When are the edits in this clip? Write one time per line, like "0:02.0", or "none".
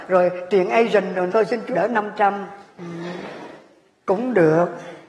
0:01.3
0:01.7